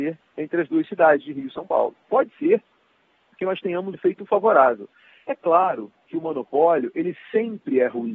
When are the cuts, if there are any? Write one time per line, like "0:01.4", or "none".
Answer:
0:02.0
0:03.9